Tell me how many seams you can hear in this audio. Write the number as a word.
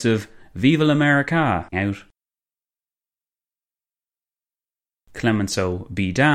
one